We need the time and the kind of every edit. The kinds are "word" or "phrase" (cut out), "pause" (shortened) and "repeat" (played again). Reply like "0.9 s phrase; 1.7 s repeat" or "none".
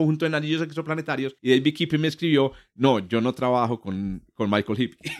1.4 s pause